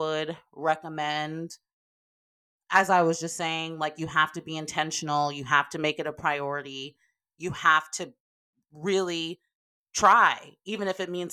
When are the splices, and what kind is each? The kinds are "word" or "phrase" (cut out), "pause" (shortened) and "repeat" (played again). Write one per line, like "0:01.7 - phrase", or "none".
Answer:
none